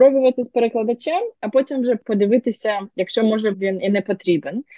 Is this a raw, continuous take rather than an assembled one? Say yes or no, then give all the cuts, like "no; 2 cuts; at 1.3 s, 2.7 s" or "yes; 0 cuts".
no; 1 cut; at 3.5 s